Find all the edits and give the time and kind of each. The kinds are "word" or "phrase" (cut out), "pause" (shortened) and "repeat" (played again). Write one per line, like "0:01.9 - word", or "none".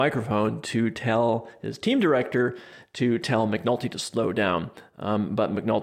none